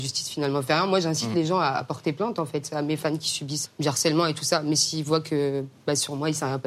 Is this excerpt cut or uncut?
cut